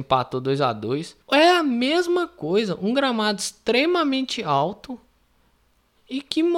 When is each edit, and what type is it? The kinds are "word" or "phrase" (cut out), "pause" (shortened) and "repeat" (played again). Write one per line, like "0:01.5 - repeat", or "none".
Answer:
0:01.2 - pause